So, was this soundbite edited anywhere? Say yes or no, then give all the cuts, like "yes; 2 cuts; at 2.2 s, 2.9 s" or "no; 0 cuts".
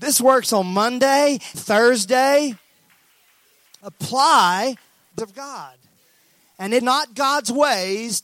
yes; 3 cuts; at 1.5 s, 5.2 s, 6.8 s